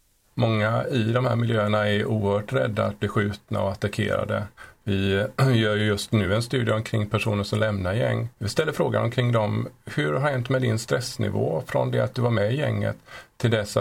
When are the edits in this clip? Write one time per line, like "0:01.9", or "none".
0:08.3